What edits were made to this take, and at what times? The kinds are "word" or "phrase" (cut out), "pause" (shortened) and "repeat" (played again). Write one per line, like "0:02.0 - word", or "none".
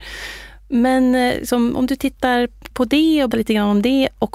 0:02.7 - word
0:03.3 - word